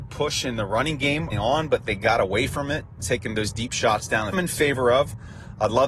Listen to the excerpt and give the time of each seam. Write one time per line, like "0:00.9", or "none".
0:01.3
0:03.0
0:04.3

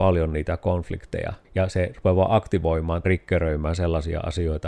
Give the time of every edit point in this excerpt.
0:01.4
0:03.0

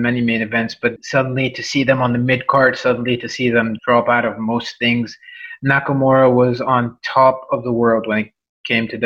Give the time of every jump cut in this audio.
0:01.0
0:03.8

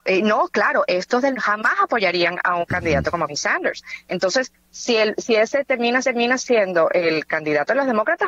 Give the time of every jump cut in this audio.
0:01.3
0:02.6
0:03.3
0:04.6
0:06.0

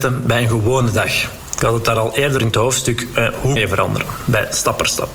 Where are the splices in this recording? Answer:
0:02.4
0:03.6

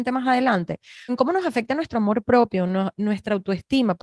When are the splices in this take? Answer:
0:01.1

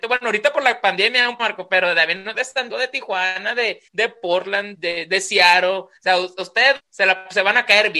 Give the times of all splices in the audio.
0:01.4
0:02.3
0:02.7
0:03.9
0:04.7
0:06.0
0:06.8

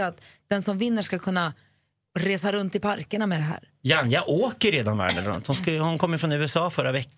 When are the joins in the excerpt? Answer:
none

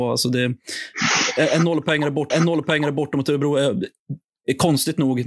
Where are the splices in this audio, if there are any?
0:02.3

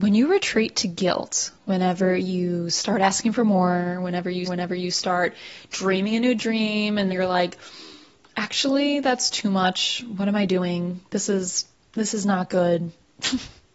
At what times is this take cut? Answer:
0:01.5
0:04.5
0:07.1
0:11.7

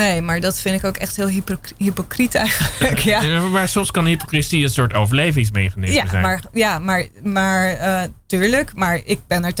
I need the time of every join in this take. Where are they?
none

